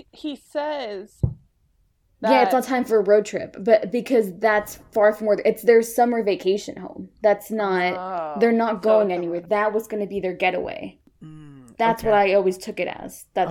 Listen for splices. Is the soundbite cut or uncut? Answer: uncut